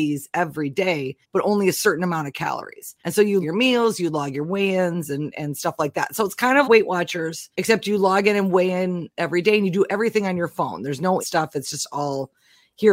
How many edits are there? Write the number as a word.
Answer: seven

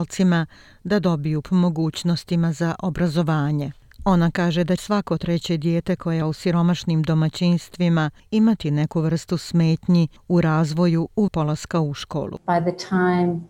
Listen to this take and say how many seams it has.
four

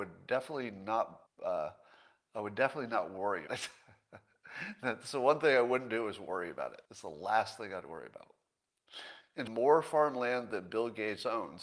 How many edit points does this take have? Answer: four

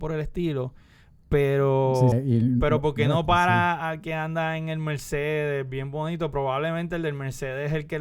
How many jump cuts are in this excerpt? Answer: one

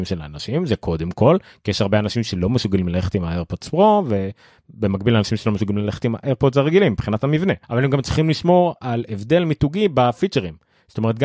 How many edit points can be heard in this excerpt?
one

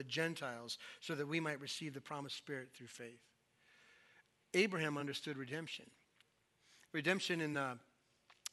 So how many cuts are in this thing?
zero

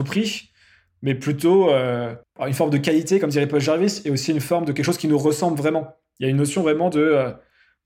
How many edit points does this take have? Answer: one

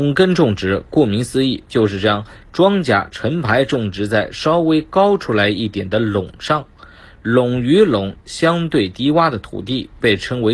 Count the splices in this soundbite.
zero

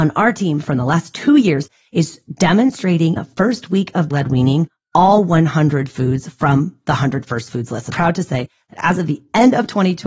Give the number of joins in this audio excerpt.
three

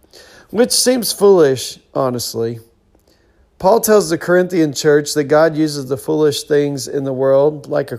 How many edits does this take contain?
zero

